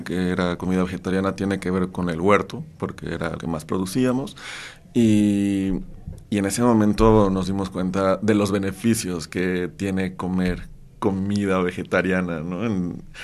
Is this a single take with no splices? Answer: no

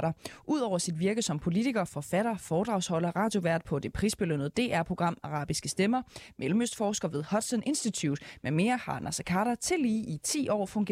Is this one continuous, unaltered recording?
yes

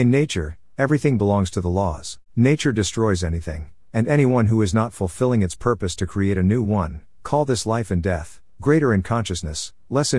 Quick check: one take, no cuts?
no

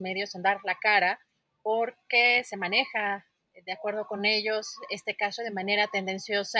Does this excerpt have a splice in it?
no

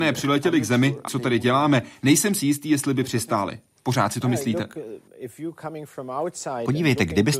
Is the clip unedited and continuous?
no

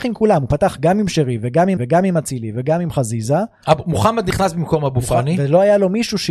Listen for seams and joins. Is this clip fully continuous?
no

